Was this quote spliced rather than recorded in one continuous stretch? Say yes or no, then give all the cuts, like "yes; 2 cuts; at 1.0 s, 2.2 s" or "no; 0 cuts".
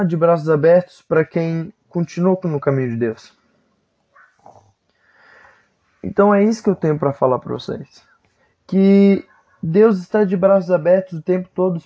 no; 0 cuts